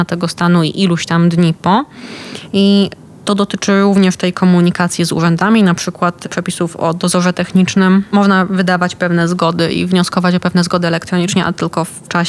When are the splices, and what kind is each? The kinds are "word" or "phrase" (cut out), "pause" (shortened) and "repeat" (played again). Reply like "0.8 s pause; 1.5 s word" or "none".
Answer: none